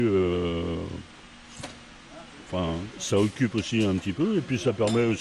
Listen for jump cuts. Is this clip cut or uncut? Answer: uncut